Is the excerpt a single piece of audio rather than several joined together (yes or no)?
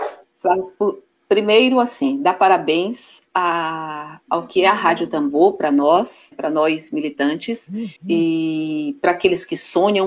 no